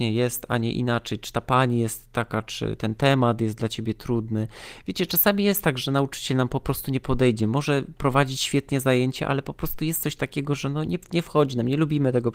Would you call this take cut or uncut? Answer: uncut